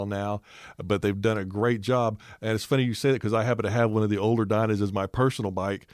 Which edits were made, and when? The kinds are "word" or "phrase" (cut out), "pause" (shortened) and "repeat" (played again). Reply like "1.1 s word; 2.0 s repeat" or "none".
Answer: none